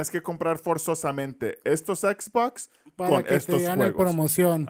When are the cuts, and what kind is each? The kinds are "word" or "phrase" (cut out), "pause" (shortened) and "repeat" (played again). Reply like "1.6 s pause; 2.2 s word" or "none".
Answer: none